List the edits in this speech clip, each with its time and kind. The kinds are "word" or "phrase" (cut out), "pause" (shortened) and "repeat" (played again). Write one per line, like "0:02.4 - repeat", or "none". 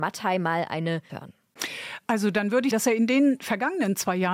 0:01.1 - word
0:02.7 - word

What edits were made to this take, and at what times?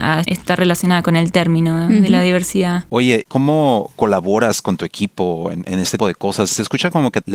0:03.3 - word
0:06.0 - word

